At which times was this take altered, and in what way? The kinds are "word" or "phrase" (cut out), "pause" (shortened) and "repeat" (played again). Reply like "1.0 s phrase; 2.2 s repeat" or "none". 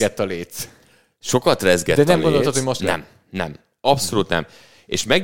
2.8 s word